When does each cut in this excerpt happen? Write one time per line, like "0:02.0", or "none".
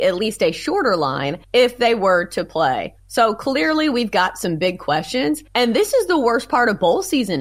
0:01.4
0:03.0
0:05.5